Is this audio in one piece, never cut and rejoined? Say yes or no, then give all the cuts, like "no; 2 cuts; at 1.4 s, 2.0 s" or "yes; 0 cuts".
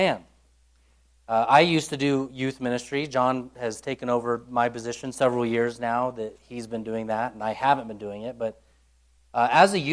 yes; 0 cuts